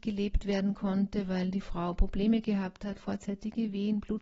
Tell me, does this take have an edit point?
no; 0 cuts

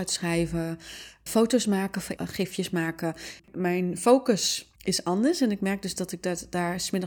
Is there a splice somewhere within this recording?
yes; 4 cuts; at 1.3 s, 2.2 s, 3.4 s, 4.8 s

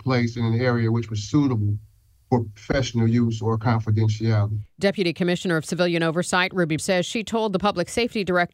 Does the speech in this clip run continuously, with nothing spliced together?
no; 1 cut; at 6.8 s

